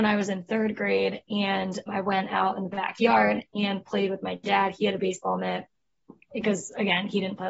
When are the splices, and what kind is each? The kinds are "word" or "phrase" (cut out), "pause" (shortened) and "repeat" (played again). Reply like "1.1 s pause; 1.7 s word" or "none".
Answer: 1.9 s word